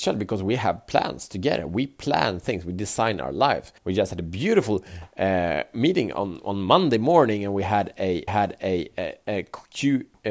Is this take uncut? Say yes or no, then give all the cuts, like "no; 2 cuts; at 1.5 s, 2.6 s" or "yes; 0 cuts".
no; 2 cuts; at 3.8 s, 8.3 s